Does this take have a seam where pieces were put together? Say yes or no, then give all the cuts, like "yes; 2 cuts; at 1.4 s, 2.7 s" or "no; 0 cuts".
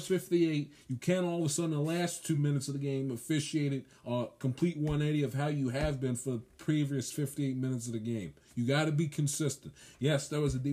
no; 0 cuts